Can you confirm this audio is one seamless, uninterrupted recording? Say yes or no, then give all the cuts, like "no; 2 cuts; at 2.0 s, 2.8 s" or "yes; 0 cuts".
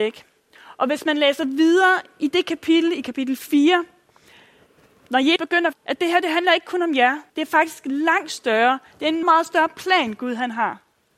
no; 4 cuts; at 5.4 s, 5.7 s, 7.3 s, 9.2 s